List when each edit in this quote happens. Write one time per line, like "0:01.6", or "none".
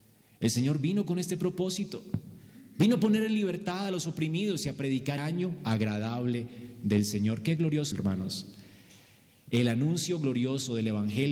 0:05.2
0:07.9